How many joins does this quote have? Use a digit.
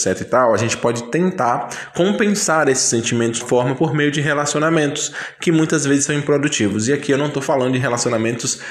1